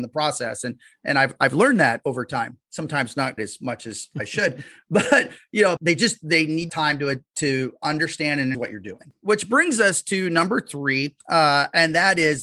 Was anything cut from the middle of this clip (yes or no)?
yes